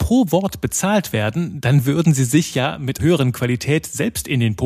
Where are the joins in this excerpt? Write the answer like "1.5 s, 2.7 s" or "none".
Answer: 3.0 s